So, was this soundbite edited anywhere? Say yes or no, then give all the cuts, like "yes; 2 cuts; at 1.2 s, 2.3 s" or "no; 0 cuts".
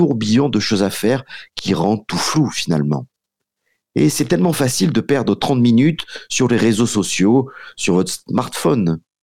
no; 0 cuts